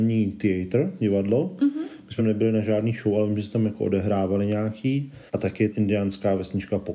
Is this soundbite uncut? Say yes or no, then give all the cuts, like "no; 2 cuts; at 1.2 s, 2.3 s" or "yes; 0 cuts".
no; 3 cuts; at 2.2 s, 5.3 s, 5.7 s